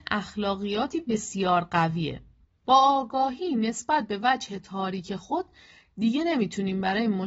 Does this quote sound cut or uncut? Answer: cut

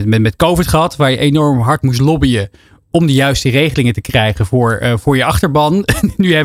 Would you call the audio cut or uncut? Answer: uncut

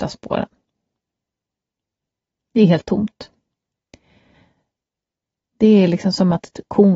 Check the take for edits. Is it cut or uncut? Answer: uncut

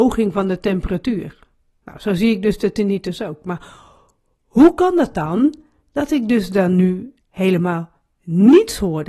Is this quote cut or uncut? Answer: cut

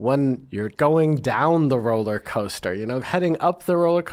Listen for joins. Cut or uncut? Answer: uncut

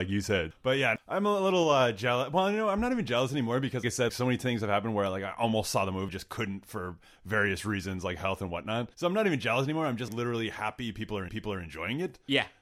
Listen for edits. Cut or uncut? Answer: cut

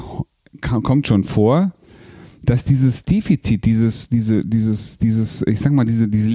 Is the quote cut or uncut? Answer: uncut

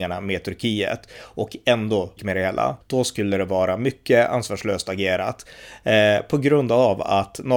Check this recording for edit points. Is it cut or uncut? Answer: cut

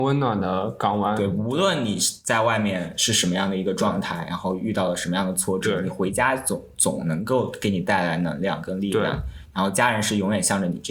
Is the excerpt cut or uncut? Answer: uncut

